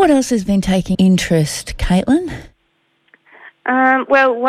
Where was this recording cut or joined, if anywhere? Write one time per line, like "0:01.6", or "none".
0:00.9